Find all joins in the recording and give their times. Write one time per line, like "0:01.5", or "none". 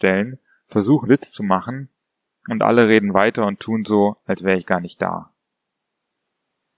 0:01.1

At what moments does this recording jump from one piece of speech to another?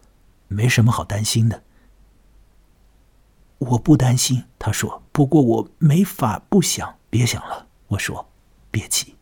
0:04.5
0:05.1
0:05.7
0:07.0
0:07.8

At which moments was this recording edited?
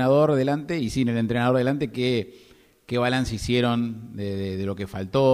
none

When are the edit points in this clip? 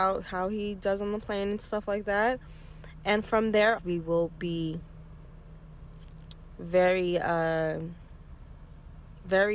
0:03.8

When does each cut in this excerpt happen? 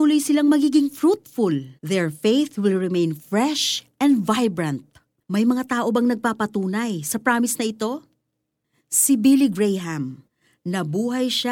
0:01.8

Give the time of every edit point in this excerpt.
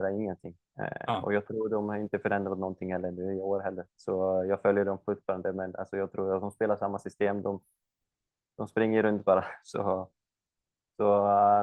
0:03.9

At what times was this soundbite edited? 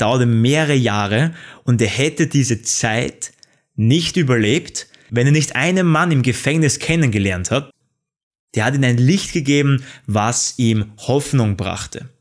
none

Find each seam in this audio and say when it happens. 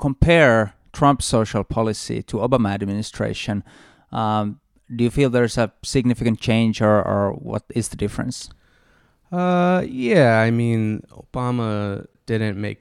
none

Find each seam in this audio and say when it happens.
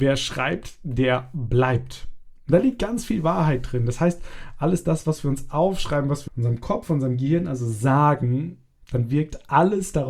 0:06.3

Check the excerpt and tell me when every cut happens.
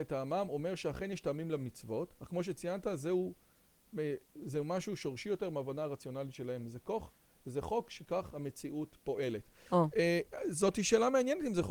none

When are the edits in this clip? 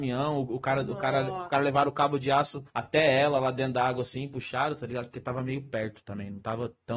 0:02.7

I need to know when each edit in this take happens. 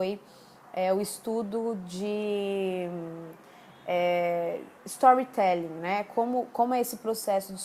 0:04.8

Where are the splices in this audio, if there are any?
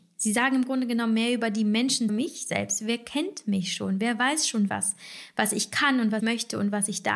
0:02.1
0:04.7
0:06.2

